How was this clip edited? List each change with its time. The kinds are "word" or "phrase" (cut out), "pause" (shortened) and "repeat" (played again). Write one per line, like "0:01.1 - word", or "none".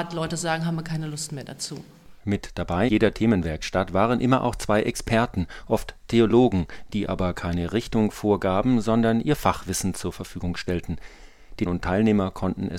0:02.9 - word
0:11.7 - word